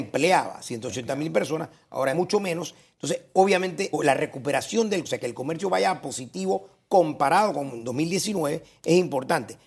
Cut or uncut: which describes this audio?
cut